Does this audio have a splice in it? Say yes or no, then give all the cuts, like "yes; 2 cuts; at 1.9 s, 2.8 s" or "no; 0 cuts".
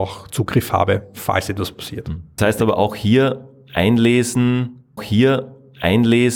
yes; 2 cuts; at 2.4 s, 5.0 s